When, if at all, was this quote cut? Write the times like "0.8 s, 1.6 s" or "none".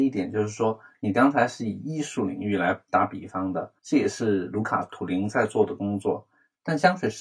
3.8 s

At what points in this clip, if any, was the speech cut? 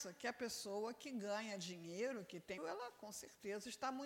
2.6 s

